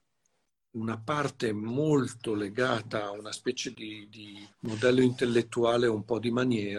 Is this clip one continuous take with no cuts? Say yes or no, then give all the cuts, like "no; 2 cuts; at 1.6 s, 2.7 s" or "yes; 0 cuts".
no; 1 cut; at 4.5 s